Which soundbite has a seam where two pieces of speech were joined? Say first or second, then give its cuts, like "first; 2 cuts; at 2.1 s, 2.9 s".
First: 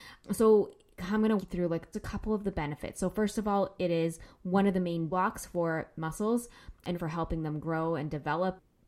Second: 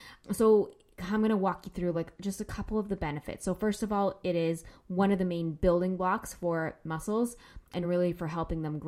first; 4 cuts; at 1.4 s, 1.9 s, 5.1 s, 6.9 s